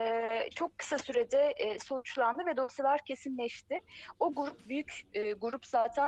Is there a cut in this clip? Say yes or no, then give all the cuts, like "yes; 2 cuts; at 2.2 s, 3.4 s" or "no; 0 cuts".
no; 0 cuts